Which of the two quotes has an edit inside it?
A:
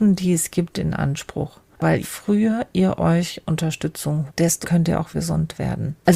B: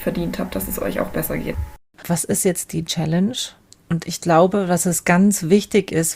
A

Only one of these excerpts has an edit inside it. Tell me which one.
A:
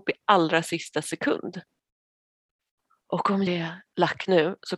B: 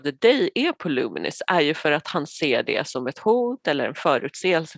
A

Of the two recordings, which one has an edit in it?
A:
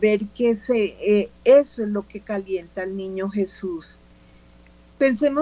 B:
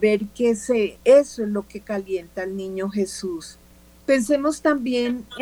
B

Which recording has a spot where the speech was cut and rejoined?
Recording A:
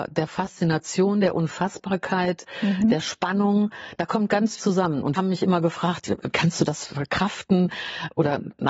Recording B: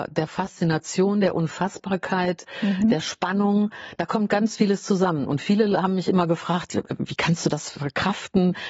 A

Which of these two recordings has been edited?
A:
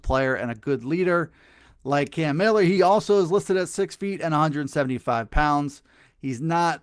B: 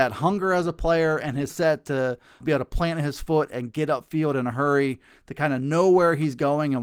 B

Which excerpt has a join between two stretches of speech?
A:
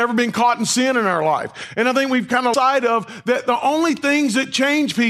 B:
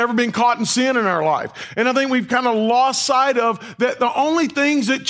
A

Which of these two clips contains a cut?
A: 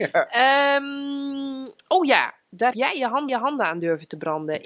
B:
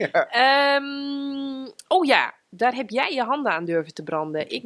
A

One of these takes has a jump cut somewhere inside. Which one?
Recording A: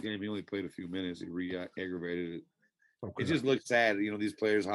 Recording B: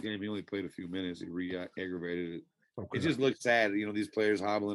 B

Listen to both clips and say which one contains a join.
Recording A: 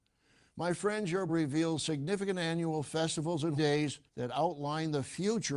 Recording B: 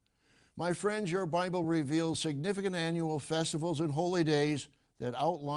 A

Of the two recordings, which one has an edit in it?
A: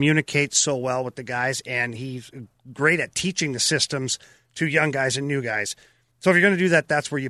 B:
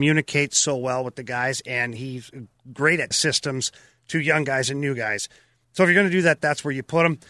B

